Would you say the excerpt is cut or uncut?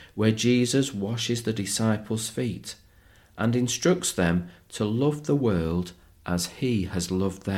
uncut